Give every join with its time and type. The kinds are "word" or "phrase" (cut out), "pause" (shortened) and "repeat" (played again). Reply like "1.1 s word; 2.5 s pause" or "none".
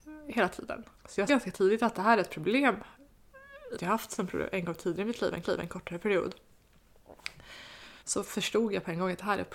0.9 s pause; 1.3 s word; 3.7 s phrase; 5.4 s repeat; 8.0 s pause